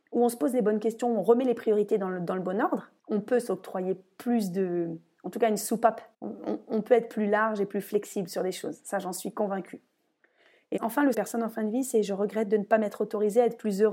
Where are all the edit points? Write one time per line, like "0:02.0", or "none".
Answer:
0:03.0
0:06.1
0:10.8
0:11.1

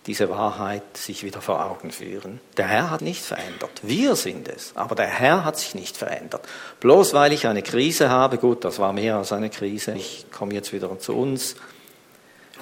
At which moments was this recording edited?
0:03.0
0:09.9

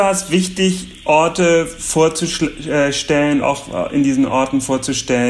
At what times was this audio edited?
0:03.4

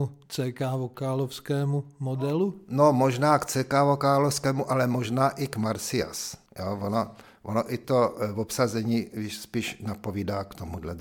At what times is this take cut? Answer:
0:06.5

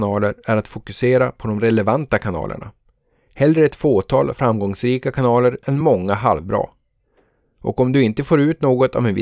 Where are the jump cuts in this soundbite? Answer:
none

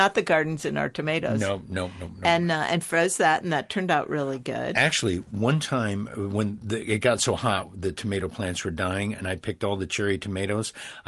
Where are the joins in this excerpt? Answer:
none

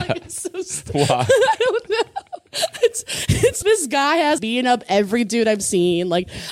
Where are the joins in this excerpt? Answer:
0:02.5
0:03.6
0:04.4

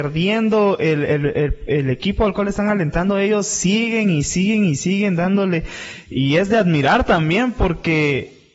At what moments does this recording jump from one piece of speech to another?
none

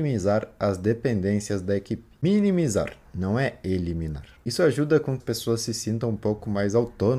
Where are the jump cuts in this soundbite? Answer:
0:05.2

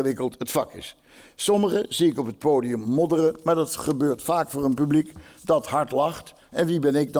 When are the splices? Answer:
none

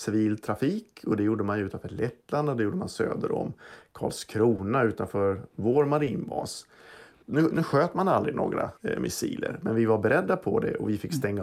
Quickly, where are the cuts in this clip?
0:07.5
0:08.8

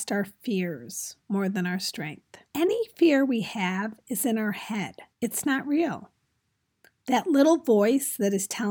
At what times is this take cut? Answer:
0:01.2
0:02.4
0:05.1

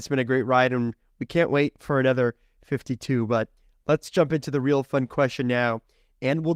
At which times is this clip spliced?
none

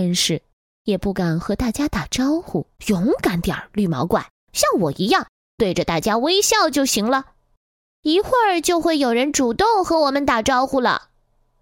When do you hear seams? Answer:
0:02.8

